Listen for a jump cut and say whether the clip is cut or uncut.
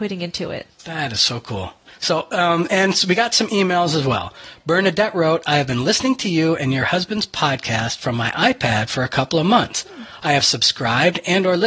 uncut